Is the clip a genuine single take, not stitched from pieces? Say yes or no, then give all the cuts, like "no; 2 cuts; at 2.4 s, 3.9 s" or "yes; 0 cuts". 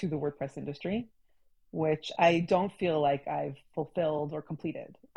yes; 0 cuts